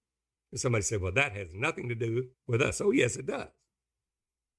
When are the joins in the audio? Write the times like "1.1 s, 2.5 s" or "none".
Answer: 2.3 s